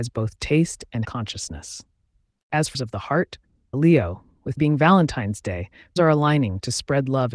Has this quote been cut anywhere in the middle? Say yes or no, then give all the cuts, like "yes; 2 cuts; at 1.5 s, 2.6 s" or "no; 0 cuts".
yes; 5 cuts; at 1.0 s, 2.7 s, 3.7 s, 4.6 s, 6.0 s